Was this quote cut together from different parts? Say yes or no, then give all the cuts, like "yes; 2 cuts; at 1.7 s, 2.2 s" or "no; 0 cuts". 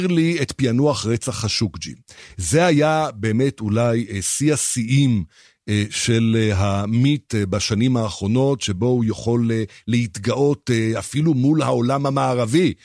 no; 0 cuts